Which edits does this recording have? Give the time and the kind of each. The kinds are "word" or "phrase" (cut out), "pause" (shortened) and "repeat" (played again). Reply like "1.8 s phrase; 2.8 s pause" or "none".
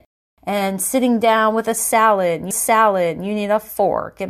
2.5 s repeat